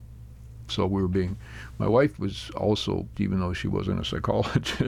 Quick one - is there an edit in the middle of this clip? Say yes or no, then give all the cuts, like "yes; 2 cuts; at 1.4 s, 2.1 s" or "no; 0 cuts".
yes; 1 cut; at 3.1 s